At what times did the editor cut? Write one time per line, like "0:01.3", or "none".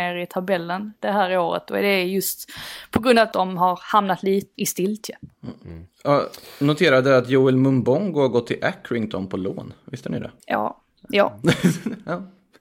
0:03.3
0:04.5
0:10.4